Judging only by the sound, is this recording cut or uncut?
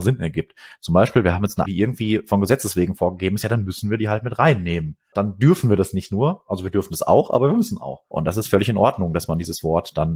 cut